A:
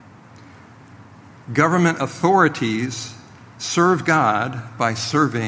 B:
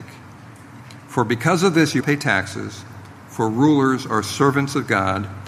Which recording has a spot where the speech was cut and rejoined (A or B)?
B